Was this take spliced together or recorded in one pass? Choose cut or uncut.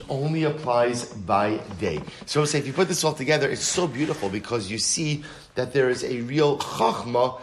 uncut